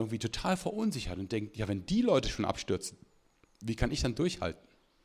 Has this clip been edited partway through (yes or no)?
no